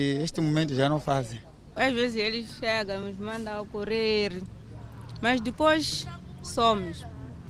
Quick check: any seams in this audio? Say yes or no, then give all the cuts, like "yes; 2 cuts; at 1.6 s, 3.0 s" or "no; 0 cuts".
no; 0 cuts